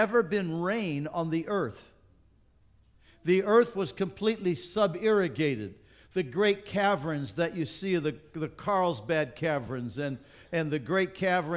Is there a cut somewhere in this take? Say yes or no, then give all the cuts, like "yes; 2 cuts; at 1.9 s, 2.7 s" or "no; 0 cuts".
no; 0 cuts